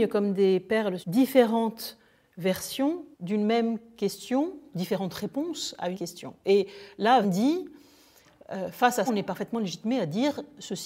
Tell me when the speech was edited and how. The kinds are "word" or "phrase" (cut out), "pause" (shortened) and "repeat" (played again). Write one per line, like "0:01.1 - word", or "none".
0:01.0 - phrase
0:03.1 - pause
0:04.7 - word
0:05.9 - word
0:07.2 - word
0:09.1 - word